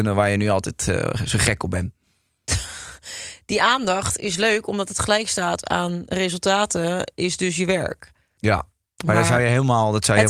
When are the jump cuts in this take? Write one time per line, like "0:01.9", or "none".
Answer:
none